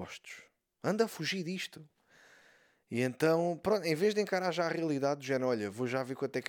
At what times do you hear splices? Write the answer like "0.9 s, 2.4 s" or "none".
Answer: none

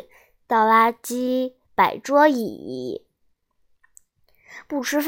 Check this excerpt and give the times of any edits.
1.6 s

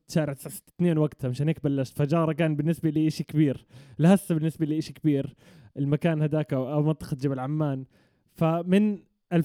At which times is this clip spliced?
none

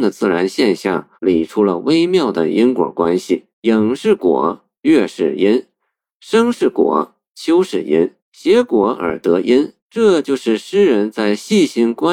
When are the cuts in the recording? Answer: 1.2 s, 3.5 s, 8.2 s, 9.8 s

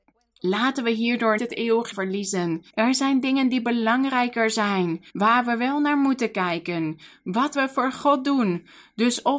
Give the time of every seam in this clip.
1.4 s, 1.9 s, 2.7 s, 5.1 s, 7.5 s

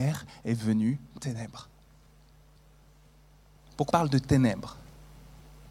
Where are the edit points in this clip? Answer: 1.2 s, 3.9 s

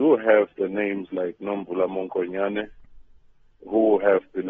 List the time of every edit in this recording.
none

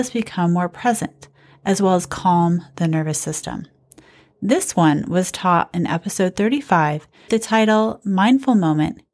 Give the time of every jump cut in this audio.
7.3 s

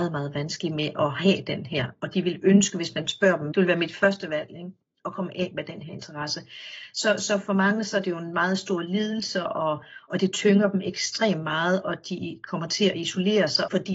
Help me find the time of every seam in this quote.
none

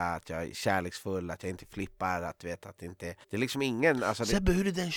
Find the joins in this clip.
3.2 s

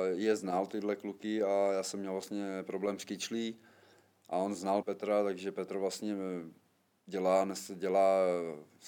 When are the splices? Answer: 4.8 s

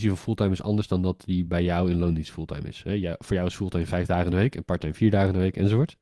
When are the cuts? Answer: none

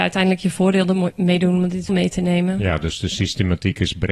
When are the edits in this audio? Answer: 1.9 s

